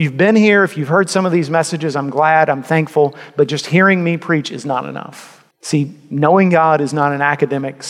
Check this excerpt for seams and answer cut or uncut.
cut